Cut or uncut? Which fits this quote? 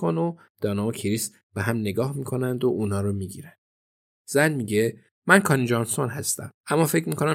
uncut